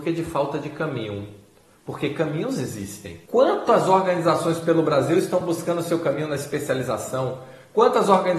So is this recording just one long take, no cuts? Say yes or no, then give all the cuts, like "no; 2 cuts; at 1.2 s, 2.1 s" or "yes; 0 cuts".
yes; 0 cuts